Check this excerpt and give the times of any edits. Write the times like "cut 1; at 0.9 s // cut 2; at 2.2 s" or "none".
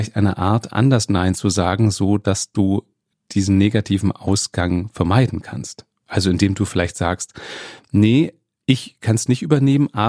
none